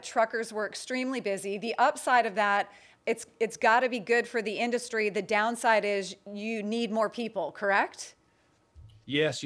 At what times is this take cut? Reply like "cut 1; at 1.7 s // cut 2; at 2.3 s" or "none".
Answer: none